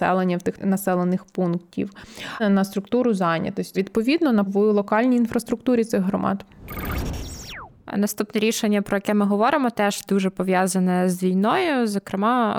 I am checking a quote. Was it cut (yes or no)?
yes